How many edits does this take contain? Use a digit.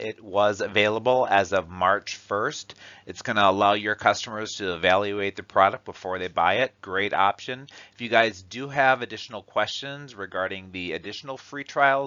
1